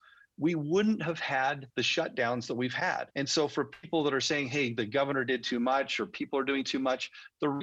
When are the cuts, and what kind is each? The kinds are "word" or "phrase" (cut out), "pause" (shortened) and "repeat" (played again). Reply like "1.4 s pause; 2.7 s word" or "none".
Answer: 1.7 s pause; 3.1 s pause